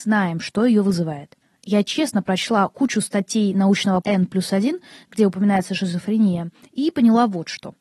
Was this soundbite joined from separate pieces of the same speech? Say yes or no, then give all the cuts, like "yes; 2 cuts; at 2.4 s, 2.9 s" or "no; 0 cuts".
yes; 1 cut; at 4.0 s